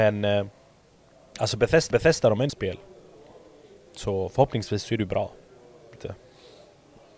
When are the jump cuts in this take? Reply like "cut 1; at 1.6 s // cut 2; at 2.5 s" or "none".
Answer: cut 1; at 1.9 s // cut 2; at 2.5 s // cut 3; at 5.9 s